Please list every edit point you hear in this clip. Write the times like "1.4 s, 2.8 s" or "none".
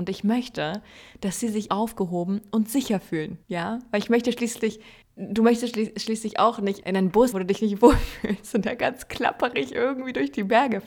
1.7 s, 3.4 s, 5.0 s, 6.8 s, 7.3 s